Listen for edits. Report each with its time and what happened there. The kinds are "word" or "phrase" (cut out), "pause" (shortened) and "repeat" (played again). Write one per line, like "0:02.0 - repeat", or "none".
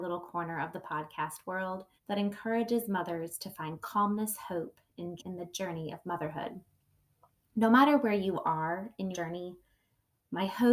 0:02.0 - pause
0:05.2 - word
0:09.1 - word